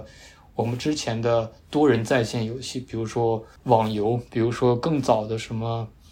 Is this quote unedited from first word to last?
no; 1 cut; at 3.6 s

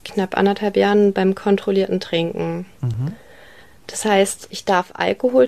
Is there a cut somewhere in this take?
no; 0 cuts

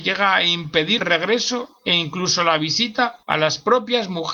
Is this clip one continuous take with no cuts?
no; 2 cuts; at 1.0 s, 3.2 s

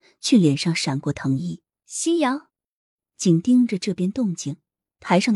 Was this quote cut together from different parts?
yes; 2 cuts; at 1.7 s, 2.9 s

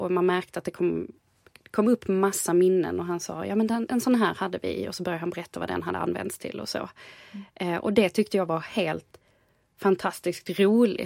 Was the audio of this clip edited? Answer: no; 0 cuts

